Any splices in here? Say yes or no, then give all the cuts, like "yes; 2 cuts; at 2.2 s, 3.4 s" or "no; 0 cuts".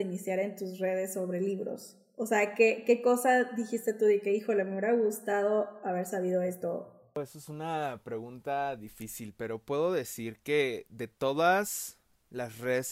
no; 0 cuts